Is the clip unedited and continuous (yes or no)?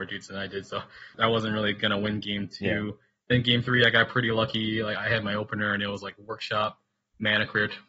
yes